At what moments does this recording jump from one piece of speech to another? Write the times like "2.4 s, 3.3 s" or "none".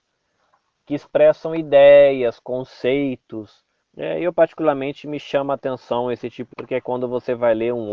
3.8 s, 6.5 s

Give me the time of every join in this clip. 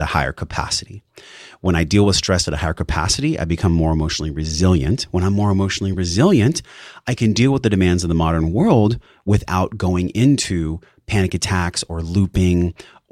none

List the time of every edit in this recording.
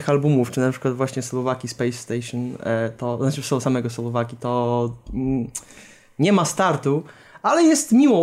none

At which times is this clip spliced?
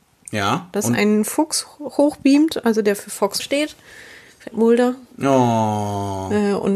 3.4 s, 4.5 s

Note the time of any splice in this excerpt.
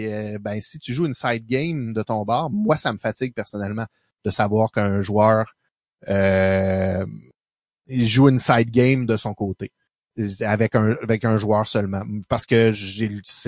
none

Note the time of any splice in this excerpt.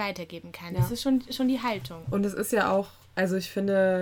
none

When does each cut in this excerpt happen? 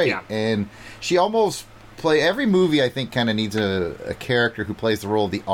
none

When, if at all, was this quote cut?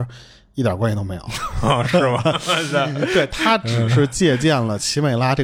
none

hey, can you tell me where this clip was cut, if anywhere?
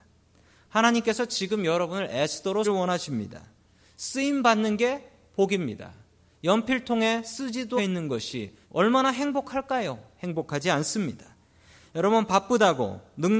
2.6 s, 7.8 s, 8.6 s

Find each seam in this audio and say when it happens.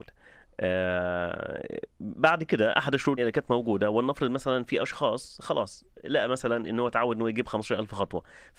3.2 s

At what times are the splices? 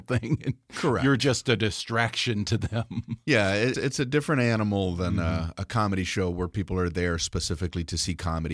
3.7 s

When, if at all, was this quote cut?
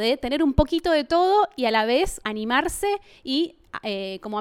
2.2 s

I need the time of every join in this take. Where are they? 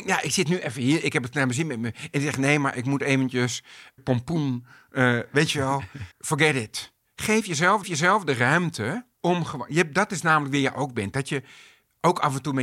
4.0 s, 6.1 s, 7.8 s, 9.1 s

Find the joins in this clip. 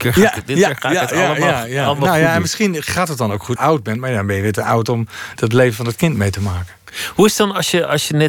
3.6 s, 5.4 s

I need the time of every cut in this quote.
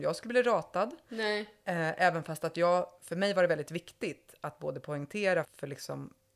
5.4 s

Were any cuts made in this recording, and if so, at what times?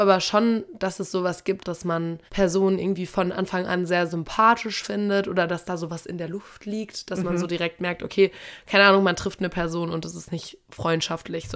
1.6 s, 2.3 s

